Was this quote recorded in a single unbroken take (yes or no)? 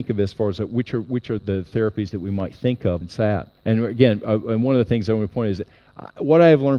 no